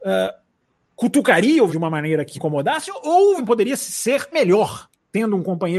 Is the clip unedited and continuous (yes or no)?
no